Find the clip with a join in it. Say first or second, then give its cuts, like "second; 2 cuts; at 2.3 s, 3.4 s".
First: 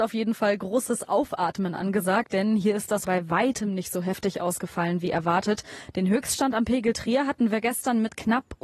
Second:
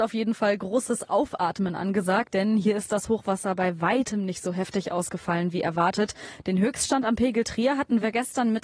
first; 1 cut; at 3.0 s